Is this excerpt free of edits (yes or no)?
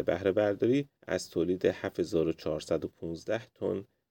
no